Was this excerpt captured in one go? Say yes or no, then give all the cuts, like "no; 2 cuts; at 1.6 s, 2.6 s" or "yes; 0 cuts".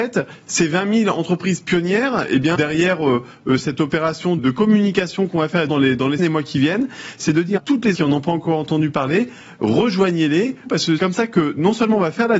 no; 9 cuts; at 2.5 s, 3.6 s, 4.4 s, 5.7 s, 6.2 s, 7.6 s, 7.9 s, 10.6 s, 11.0 s